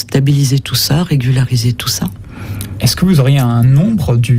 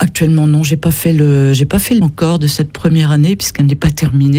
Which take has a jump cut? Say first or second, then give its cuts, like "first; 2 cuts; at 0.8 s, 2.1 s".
second; 1 cut; at 2.0 s